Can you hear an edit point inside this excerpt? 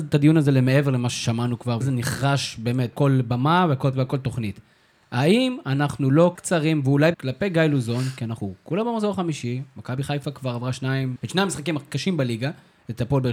yes; 6 cuts; at 1.8 s, 2.9 s, 3.9 s, 6.3 s, 7.1 s, 11.2 s

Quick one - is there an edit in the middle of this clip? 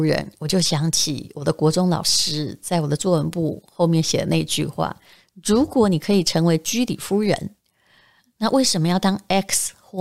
no; 0 cuts

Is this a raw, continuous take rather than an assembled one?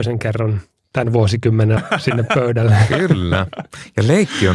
no; 1 cut; at 1.8 s

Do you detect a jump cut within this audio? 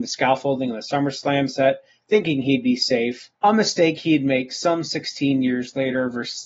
yes; 1 cut; at 3.3 s

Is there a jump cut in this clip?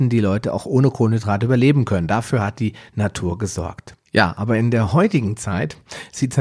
yes; 1 cut; at 4.1 s

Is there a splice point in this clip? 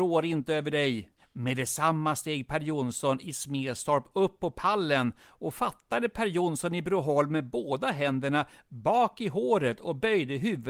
no; 0 cuts

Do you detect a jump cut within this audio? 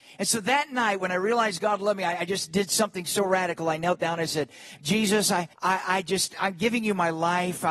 yes; 1 cut; at 5.5 s

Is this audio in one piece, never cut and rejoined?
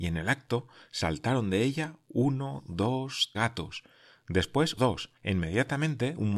no; 3 cuts; at 3.3 s, 4.8 s, 5.2 s

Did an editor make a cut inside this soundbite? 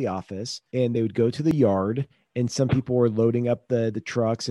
no; 0 cuts

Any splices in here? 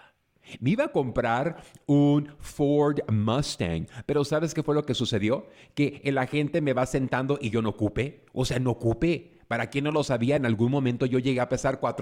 no; 0 cuts

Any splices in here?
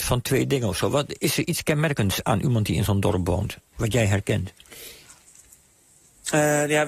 no; 0 cuts

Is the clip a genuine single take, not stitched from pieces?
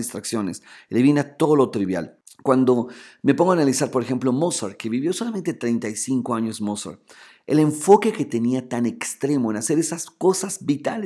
yes; 0 cuts

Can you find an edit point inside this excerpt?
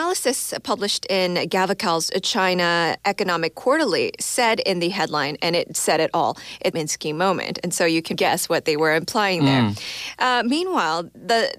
yes; 3 cuts; at 3.0 s, 6.7 s, 8.1 s

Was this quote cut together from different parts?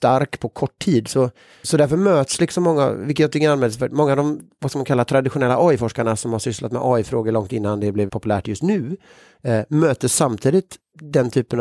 yes; 2 cuts; at 1.6 s, 8.1 s

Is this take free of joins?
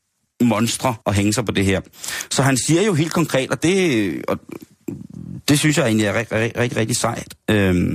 no; 1 cut; at 1.0 s

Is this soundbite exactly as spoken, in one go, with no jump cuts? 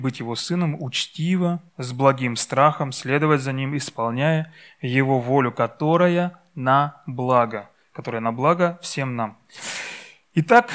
no; 1 cut; at 1.7 s

